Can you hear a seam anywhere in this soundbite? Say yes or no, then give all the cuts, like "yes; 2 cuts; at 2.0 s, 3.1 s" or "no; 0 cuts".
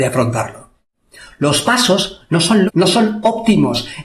yes; 1 cut; at 2.7 s